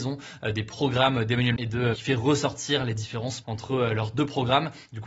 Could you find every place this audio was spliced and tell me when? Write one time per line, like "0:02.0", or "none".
0:01.6
0:01.9
0:03.4